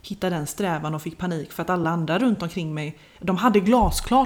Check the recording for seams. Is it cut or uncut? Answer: uncut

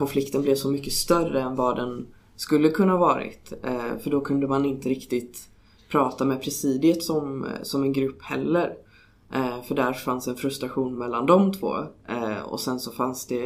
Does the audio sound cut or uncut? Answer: uncut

